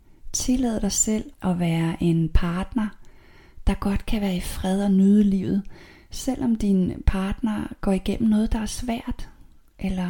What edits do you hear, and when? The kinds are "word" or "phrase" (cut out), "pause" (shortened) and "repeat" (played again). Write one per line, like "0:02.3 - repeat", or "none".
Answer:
0:01.3 - word